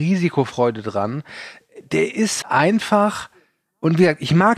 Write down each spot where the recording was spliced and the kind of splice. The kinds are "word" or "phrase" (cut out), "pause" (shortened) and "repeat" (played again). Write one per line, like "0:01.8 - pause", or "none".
0:02.4 - word